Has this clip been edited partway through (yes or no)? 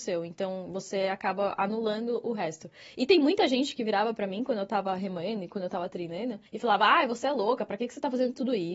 yes